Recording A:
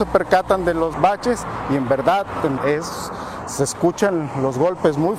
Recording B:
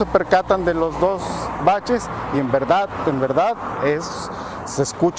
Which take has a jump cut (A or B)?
A